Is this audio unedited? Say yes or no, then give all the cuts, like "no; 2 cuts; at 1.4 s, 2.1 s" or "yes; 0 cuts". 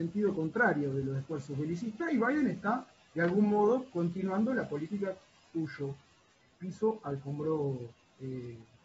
yes; 0 cuts